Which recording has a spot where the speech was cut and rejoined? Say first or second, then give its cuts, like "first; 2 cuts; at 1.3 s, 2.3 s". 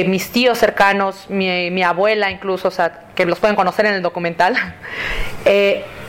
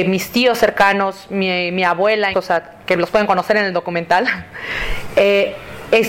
second; 1 cut; at 2.3 s